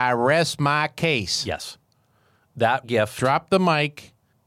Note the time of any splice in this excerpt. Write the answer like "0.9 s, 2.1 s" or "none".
2.8 s